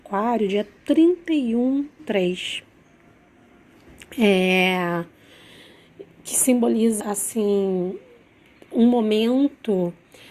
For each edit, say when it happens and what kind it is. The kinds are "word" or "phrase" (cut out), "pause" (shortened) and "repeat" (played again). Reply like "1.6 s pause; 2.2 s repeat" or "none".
2.0 s word; 7.0 s word